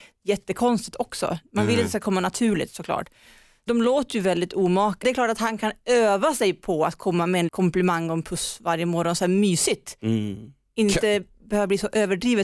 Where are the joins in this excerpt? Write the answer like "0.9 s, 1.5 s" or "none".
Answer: 3.7 s, 5.0 s, 5.6 s, 7.5 s